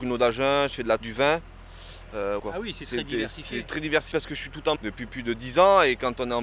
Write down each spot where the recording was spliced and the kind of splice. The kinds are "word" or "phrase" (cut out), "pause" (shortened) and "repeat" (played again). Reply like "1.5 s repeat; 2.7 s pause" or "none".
1.0 s word; 2.4 s word; 4.1 s word; 4.8 s word